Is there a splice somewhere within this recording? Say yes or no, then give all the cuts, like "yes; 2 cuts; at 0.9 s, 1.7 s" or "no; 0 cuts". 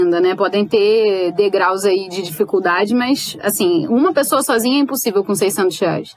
no; 0 cuts